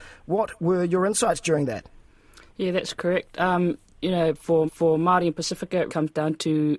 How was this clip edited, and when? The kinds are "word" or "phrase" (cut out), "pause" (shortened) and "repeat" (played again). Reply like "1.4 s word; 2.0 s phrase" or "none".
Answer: 4.7 s repeat; 5.9 s word